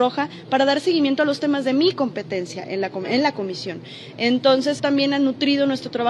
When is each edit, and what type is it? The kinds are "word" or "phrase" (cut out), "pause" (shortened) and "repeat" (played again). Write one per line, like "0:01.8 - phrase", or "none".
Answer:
0:04.8 - word